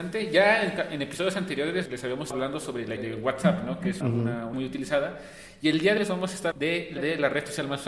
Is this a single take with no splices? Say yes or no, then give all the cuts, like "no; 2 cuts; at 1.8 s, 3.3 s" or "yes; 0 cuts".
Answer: no; 8 cuts; at 1.9 s, 2.3 s, 3.0 s, 4.0 s, 4.5 s, 6.0 s, 6.5 s, 7.0 s